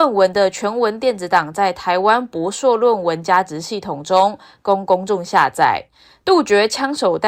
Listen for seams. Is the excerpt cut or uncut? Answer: uncut